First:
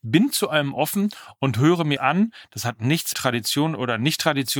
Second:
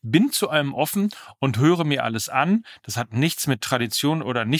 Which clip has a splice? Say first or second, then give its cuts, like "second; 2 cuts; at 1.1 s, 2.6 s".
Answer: first; 2 cuts; at 2.0 s, 3.1 s